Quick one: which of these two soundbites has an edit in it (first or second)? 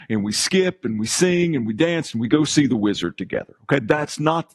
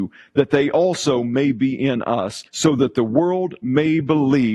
second